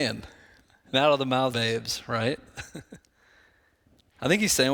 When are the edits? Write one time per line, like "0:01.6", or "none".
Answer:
0:00.9
0:01.5